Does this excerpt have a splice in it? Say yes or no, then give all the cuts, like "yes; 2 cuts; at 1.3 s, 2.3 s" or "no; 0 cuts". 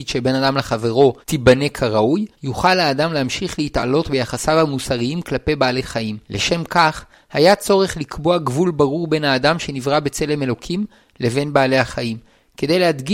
yes; 3 cuts; at 1.2 s, 2.3 s, 6.2 s